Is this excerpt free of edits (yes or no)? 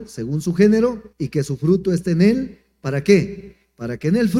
no